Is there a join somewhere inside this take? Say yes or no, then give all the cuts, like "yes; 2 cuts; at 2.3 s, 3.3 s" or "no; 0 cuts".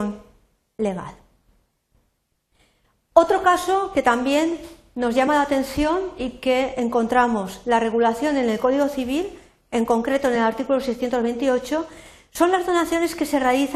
no; 0 cuts